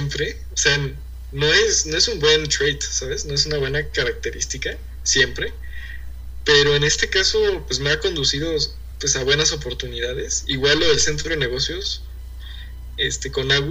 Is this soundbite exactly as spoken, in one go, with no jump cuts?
yes; 0 cuts

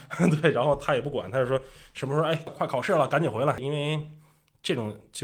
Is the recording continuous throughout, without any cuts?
yes; 0 cuts

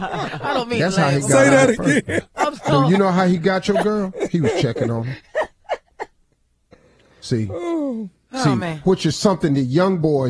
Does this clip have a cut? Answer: no; 0 cuts

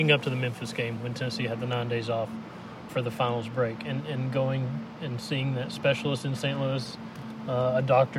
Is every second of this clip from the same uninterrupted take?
no; 1 cut; at 2.9 s

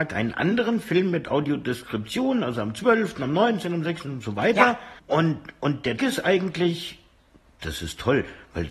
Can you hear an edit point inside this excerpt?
yes; 2 cuts; at 5.0 s, 6.0 s

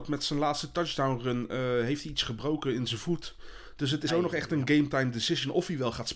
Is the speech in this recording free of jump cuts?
no; 1 cut; at 4.1 s

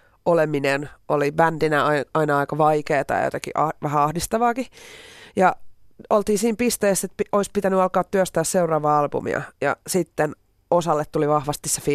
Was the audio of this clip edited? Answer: no; 0 cuts

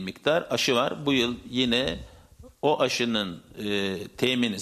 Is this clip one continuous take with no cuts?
yes; 0 cuts

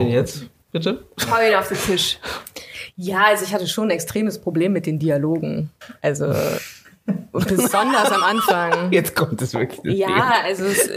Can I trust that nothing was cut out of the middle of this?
yes; 0 cuts

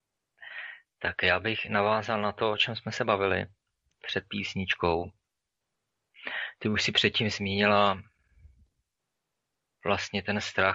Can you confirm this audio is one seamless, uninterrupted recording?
yes; 0 cuts

